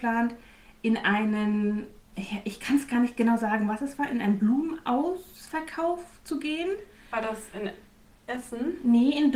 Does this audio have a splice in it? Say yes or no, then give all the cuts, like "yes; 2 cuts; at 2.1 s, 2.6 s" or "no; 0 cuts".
no; 0 cuts